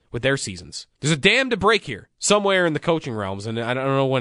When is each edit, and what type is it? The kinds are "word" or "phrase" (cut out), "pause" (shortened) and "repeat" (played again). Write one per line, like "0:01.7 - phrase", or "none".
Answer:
0:00.9 - pause